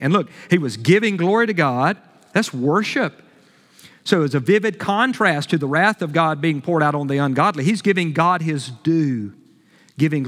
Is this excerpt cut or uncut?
uncut